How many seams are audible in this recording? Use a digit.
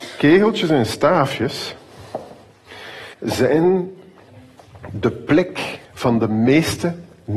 2